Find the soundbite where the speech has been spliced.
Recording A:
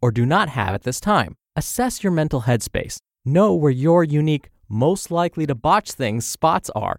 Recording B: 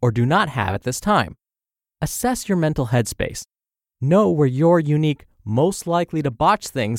A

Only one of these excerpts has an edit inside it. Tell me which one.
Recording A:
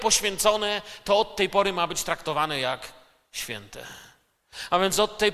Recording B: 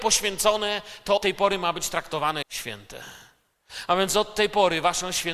B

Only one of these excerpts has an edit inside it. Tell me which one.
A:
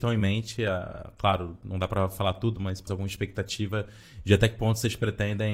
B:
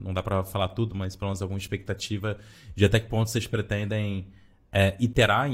A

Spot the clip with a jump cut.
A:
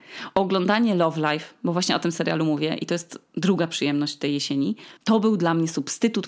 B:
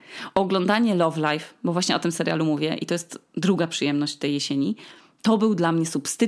A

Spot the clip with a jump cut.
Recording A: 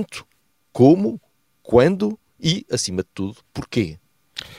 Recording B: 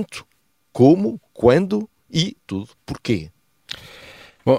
B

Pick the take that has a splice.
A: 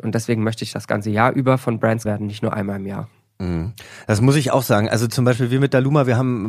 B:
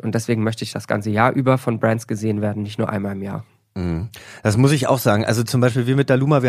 A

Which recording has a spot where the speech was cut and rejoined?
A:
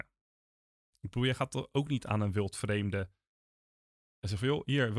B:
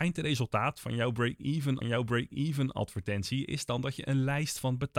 B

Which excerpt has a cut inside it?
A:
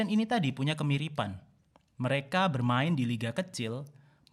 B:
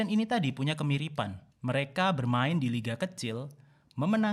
B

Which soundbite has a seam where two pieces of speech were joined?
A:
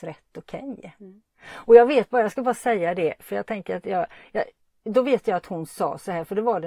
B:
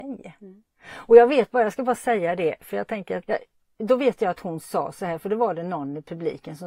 B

